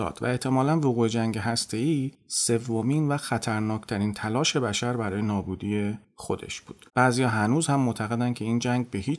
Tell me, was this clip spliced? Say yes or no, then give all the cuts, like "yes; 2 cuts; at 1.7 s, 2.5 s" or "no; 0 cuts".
yes; 1 cut; at 6.9 s